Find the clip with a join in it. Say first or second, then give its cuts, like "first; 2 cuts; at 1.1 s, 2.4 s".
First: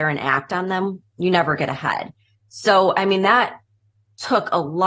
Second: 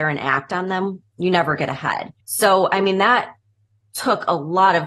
second; 1 cut; at 2.2 s